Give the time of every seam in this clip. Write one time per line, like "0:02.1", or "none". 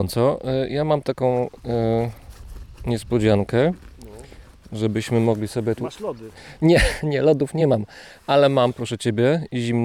none